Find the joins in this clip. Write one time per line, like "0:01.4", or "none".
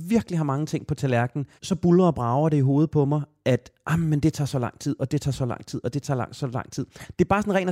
0:01.6